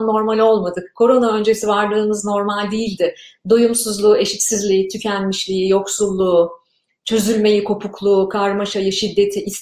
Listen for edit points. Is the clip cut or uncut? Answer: uncut